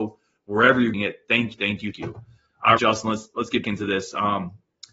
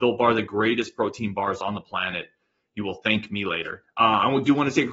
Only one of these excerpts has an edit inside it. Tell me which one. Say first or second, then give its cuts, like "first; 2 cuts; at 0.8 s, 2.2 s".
first; 5 cuts; at 0.9 s, 1.5 s, 1.9 s, 2.8 s, 3.6 s